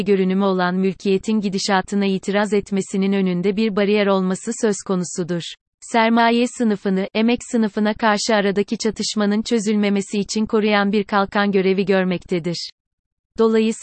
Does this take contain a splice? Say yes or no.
yes